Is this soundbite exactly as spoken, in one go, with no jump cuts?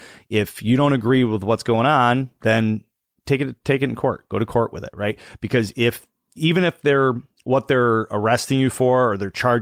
yes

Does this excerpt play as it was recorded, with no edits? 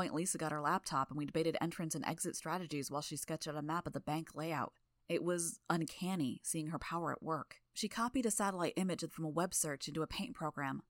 no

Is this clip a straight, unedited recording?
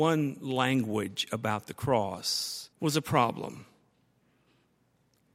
no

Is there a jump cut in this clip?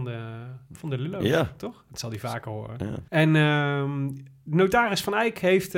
yes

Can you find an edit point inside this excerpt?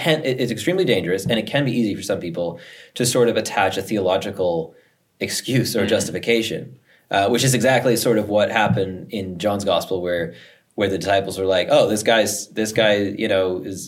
no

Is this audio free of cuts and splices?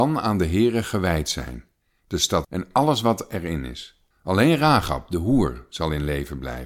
no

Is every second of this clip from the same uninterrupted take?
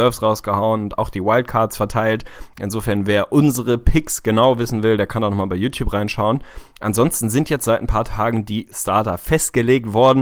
yes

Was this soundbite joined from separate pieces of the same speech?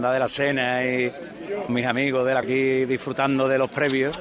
yes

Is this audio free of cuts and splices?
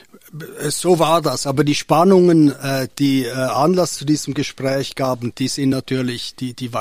yes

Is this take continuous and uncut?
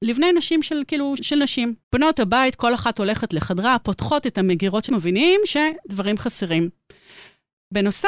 no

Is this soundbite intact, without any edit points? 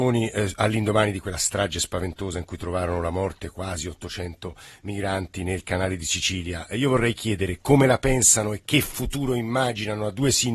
yes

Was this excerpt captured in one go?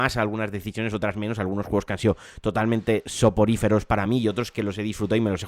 yes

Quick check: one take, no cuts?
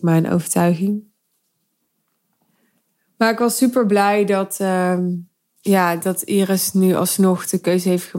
yes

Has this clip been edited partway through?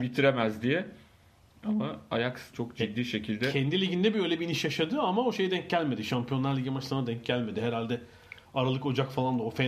yes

